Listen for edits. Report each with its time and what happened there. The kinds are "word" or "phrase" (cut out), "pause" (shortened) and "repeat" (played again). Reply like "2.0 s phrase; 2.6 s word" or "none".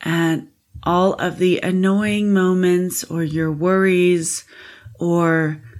none